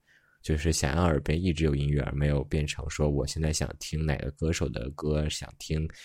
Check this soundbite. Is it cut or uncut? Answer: uncut